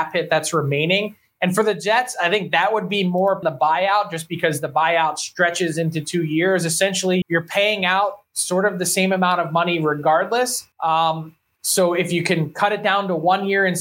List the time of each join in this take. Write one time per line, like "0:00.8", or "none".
0:03.4
0:07.2
0:10.7